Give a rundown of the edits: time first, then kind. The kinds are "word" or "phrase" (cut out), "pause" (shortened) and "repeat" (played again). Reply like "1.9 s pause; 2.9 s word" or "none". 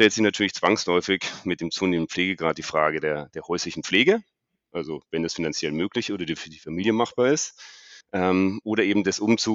8.0 s pause